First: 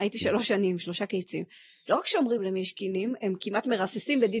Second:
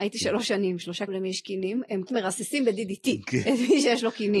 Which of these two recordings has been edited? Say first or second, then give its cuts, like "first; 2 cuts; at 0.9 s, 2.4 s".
second; 2 cuts; at 1.1 s, 2.1 s